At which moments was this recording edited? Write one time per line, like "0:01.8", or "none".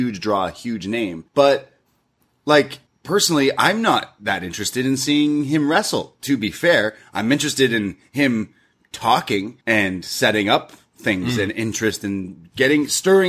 0:01.3
0:02.9
0:09.6